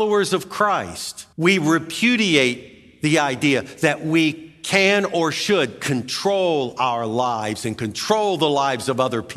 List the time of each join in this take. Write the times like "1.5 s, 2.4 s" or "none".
1.3 s